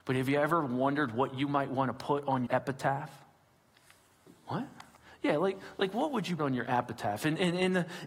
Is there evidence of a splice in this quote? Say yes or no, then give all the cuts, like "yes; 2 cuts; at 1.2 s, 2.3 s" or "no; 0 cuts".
yes; 3 cuts; at 2.5 s, 5.0 s, 6.4 s